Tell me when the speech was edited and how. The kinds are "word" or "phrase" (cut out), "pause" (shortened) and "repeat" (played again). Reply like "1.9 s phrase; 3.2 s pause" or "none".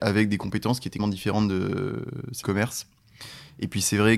1.0 s word; 2.4 s word